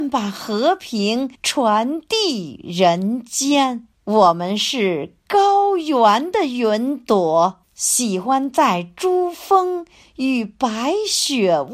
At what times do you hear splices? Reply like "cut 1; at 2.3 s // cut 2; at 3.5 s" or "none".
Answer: cut 1; at 1.3 s // cut 2; at 3.9 s // cut 3; at 7.6 s